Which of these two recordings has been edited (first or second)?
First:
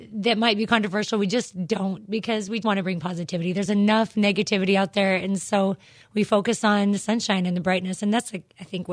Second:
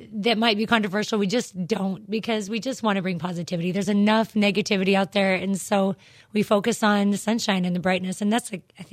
first